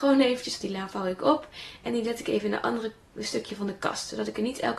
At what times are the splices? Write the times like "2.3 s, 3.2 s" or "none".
none